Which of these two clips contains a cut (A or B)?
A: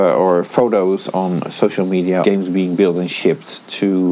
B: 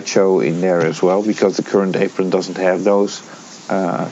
A